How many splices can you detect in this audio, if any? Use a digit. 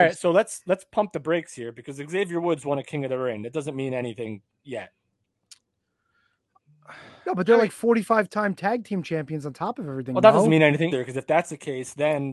1